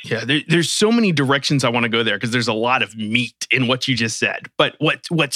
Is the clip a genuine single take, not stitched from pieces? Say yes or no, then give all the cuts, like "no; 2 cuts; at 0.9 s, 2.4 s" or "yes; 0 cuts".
yes; 0 cuts